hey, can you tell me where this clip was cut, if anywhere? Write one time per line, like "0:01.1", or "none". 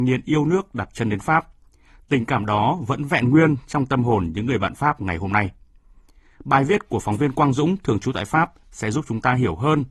none